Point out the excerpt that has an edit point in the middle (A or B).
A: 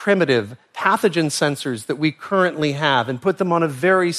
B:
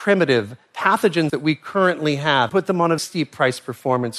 B